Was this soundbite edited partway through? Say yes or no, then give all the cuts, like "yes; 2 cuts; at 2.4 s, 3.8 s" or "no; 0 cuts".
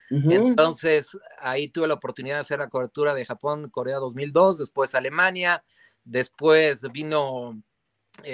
no; 0 cuts